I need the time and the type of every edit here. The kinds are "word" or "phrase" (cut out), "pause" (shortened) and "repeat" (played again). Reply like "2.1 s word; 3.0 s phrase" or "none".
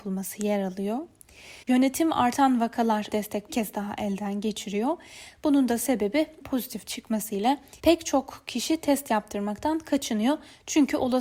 1.6 s pause; 3.1 s phrase; 3.5 s phrase; 6.4 s phrase; 7.8 s pause